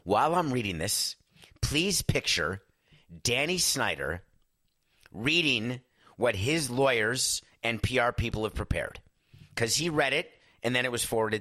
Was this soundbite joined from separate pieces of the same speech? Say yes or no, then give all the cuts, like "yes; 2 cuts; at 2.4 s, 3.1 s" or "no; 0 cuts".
no; 0 cuts